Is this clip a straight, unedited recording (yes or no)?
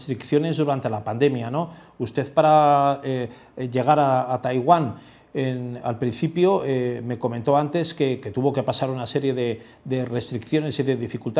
yes